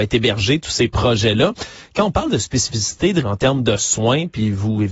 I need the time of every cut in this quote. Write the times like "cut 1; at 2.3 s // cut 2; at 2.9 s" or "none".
cut 1; at 3.2 s